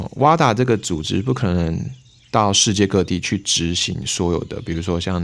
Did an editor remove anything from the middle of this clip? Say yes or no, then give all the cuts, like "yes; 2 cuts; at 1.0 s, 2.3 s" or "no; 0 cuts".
no; 0 cuts